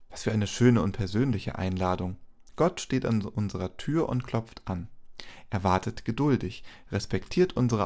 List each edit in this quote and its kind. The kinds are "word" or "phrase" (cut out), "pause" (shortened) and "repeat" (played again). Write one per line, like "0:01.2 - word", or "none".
0:02.5 - pause